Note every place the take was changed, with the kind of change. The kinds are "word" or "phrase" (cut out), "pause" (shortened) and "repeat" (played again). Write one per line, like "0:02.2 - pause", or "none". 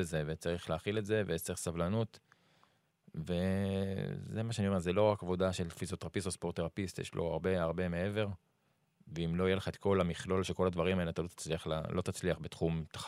none

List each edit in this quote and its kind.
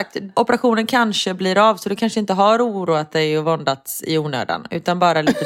none

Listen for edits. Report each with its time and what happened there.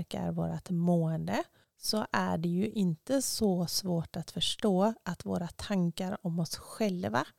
none

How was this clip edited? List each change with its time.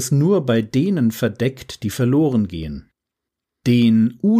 none

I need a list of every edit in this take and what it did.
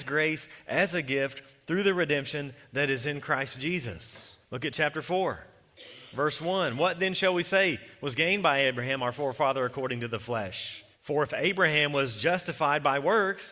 0:04.4 - pause
0:10.9 - pause

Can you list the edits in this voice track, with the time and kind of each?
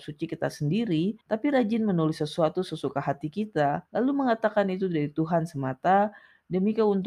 0:01.2 - pause
0:03.9 - pause

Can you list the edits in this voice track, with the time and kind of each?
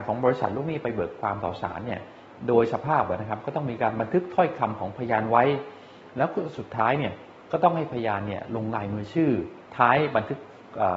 0:09.7 - pause

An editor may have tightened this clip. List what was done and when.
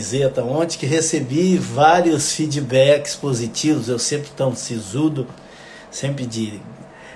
none

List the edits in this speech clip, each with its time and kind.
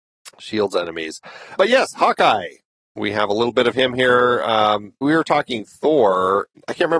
0:01.6 - word
0:02.7 - pause
0:05.0 - word

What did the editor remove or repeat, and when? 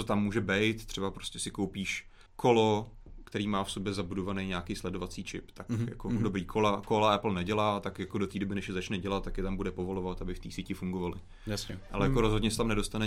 0:02.3 - pause

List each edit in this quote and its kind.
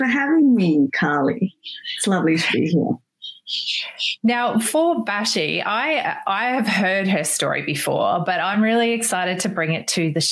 none

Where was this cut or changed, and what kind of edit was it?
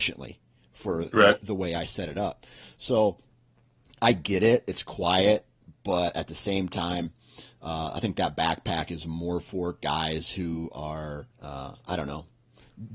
0:11.3 - pause

